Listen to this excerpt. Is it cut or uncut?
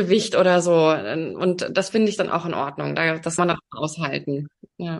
cut